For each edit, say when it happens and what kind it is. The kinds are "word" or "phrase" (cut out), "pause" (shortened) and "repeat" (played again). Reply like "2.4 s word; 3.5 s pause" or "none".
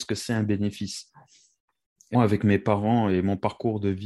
2.1 s word